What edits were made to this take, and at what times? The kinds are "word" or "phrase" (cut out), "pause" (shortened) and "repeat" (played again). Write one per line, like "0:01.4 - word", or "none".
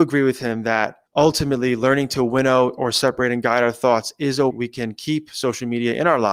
0:01.1 - pause
0:04.5 - word